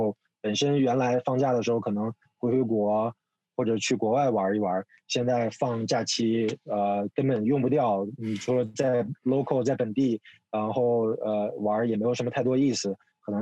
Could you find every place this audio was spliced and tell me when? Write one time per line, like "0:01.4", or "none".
none